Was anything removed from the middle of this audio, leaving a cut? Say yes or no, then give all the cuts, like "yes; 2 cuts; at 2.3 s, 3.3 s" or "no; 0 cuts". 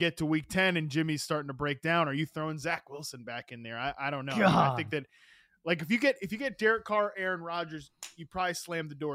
no; 0 cuts